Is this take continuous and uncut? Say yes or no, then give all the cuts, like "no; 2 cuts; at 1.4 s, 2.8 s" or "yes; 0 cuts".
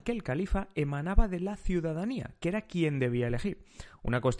yes; 0 cuts